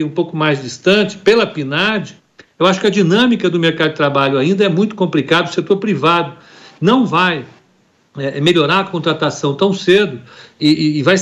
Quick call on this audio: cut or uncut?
uncut